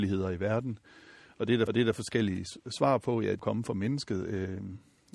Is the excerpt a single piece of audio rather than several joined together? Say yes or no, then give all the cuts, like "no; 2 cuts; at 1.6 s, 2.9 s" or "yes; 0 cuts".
no; 2 cuts; at 1.7 s, 3.4 s